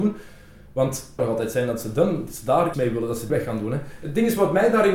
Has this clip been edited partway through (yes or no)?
yes